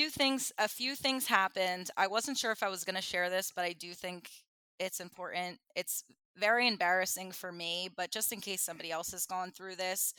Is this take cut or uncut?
uncut